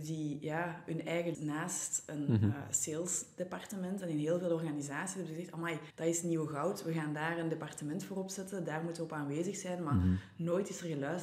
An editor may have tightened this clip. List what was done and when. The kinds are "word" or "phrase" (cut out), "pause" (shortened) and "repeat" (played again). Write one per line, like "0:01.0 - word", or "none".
0:01.3 - phrase
0:05.9 - pause